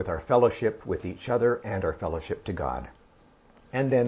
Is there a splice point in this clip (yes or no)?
no